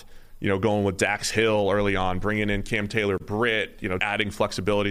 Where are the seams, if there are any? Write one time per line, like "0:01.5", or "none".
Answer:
0:04.0